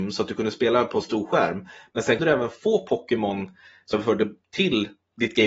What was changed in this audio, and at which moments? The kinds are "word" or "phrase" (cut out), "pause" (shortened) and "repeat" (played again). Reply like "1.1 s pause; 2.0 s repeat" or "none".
2.2 s word; 3.9 s word